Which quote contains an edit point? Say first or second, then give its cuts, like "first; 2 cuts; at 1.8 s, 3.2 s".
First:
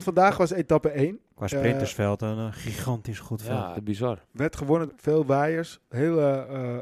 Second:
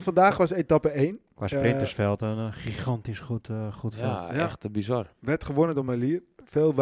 first; 3 cuts; at 3.2 s, 3.7 s, 4.9 s